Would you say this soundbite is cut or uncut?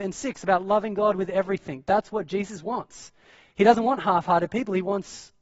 uncut